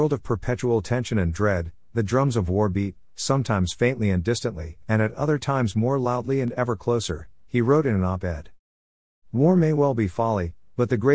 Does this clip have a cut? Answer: no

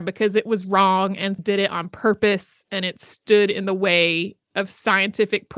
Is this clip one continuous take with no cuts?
no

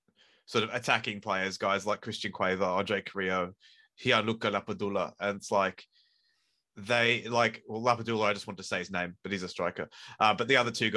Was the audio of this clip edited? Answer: no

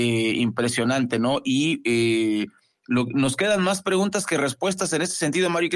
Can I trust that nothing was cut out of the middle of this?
yes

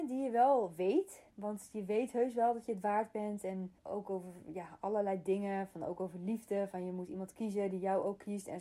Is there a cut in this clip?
yes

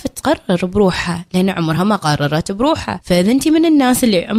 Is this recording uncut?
yes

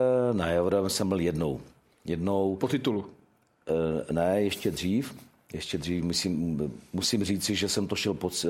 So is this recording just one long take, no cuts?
yes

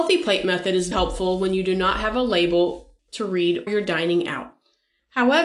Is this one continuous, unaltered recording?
no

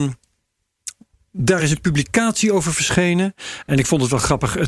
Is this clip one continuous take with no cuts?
yes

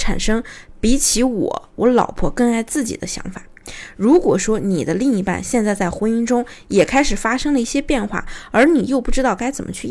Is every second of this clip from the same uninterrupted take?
yes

